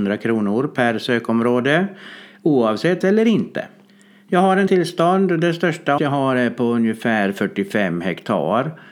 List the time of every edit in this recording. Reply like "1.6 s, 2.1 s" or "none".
3.0 s, 3.9 s, 4.7 s, 6.0 s